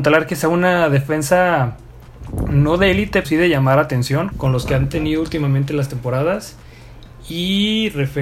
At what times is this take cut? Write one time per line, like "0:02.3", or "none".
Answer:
0:03.2
0:04.3